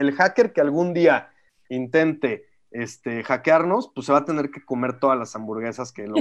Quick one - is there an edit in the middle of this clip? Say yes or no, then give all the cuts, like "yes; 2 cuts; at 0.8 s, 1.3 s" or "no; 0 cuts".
no; 0 cuts